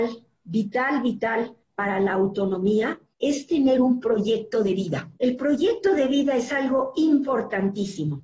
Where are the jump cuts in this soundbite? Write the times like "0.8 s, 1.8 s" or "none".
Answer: 1.6 s, 3.1 s, 5.2 s